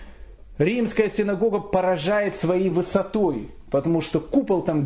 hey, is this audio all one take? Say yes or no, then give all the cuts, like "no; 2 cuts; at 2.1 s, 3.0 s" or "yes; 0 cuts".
yes; 0 cuts